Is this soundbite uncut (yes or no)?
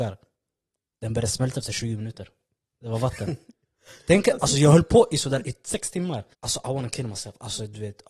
no